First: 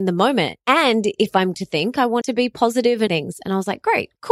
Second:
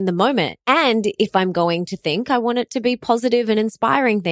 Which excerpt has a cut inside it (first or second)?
first